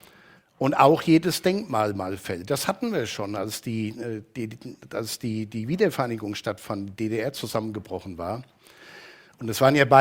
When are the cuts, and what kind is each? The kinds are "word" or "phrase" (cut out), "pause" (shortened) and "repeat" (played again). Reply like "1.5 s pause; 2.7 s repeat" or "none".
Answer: none